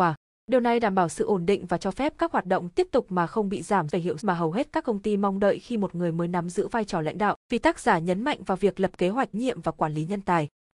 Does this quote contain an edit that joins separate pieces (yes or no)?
yes